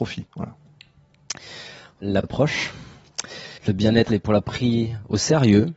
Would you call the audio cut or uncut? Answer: cut